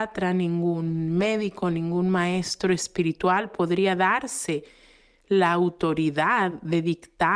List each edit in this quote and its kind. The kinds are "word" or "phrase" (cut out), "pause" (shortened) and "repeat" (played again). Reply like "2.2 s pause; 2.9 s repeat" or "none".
none